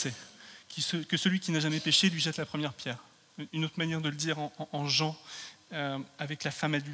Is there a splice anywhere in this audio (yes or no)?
no